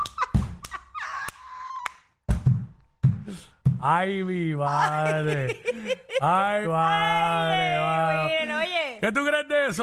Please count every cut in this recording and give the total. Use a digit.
1